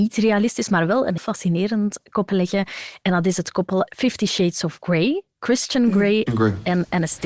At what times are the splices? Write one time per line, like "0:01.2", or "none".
0:01.2
0:02.3
0:03.9
0:06.3